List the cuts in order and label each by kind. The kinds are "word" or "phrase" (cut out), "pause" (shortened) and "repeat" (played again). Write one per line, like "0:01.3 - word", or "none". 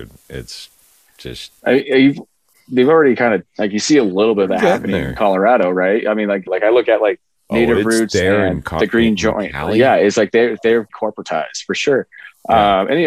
0:06.5 - phrase
0:10.9 - word